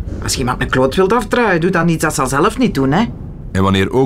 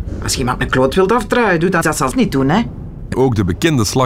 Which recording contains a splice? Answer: second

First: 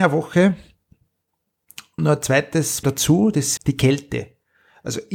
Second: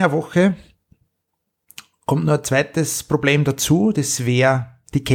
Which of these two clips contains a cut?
first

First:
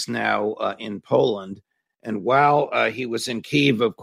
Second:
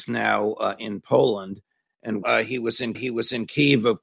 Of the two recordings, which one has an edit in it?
second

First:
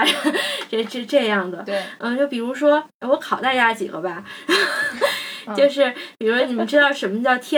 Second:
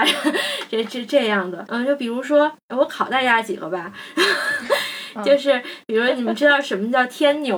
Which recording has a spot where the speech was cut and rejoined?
second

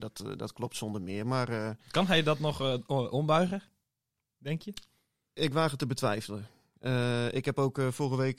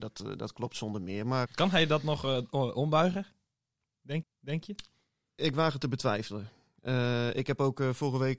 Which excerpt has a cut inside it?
second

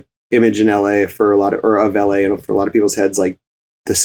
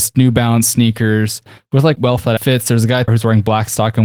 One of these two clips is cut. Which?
second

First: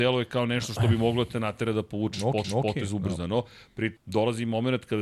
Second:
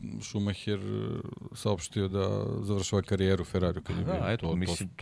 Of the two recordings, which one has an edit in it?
first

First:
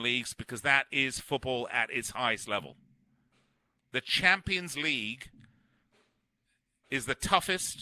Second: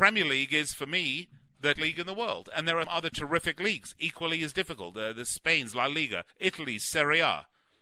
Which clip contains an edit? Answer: second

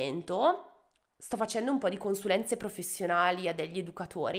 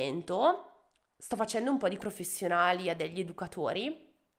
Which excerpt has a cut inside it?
second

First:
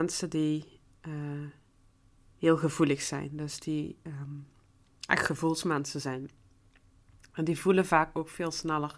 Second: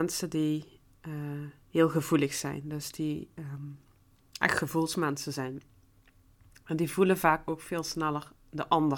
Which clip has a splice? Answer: second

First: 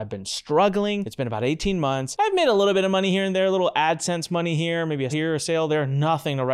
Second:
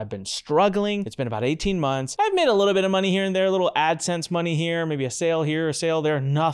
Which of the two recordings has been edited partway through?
first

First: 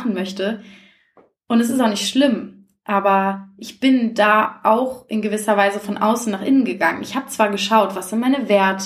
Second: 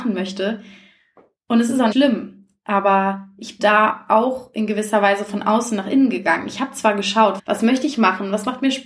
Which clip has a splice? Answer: second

